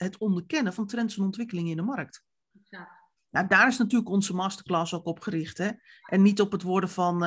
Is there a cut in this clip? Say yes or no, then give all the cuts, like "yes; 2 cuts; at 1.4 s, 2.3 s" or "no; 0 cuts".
no; 0 cuts